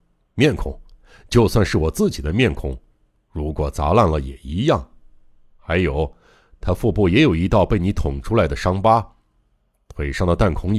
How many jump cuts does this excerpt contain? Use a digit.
0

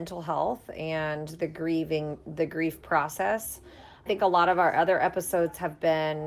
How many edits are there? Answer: 1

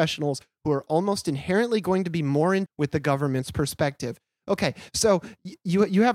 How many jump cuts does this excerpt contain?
1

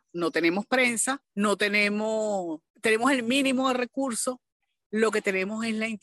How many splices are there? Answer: 2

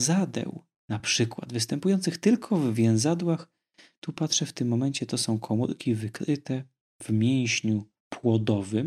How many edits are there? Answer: 0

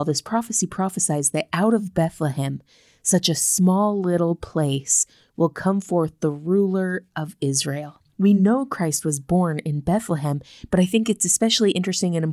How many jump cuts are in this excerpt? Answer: 0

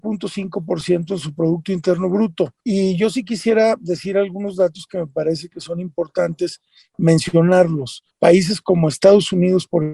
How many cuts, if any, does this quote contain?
2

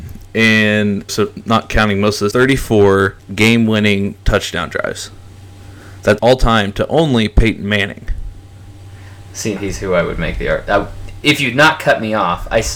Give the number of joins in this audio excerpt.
5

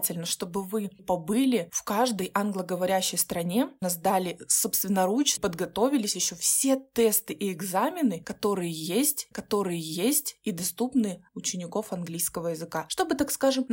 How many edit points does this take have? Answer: 5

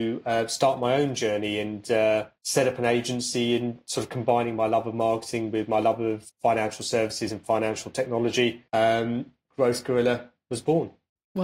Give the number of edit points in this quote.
3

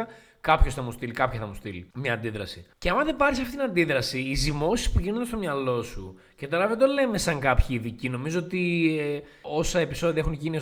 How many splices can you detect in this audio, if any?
0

